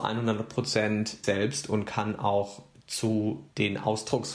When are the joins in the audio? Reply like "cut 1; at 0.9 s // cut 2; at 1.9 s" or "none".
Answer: cut 1; at 1.2 s